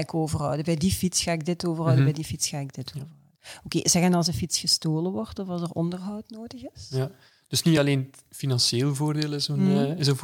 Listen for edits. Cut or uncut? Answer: uncut